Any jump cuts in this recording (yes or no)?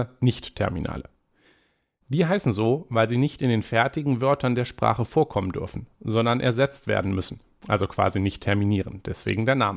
no